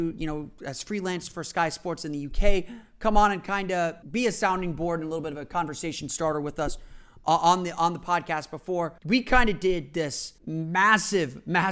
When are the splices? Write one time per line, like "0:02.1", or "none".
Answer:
0:04.0
0:09.0
0:10.4